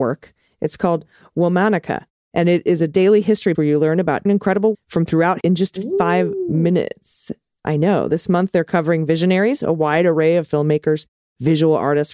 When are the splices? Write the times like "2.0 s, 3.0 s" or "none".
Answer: 3.5 s, 4.3 s, 4.7 s, 5.4 s, 10.5 s